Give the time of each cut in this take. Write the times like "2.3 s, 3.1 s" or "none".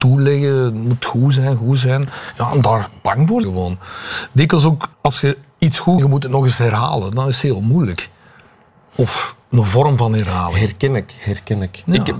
3.4 s, 4.9 s, 6.0 s